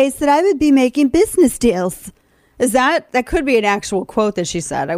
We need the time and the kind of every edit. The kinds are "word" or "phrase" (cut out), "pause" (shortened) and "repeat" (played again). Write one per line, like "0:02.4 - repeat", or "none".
none